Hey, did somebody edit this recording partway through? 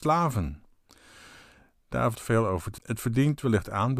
yes; 2 cuts; at 2.1 s, 2.8 s

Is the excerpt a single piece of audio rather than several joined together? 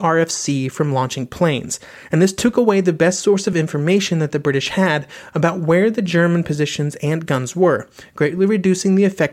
yes; 0 cuts

